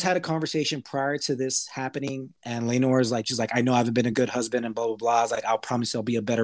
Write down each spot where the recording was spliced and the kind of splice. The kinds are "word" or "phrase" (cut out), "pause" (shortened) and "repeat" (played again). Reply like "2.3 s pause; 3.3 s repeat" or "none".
none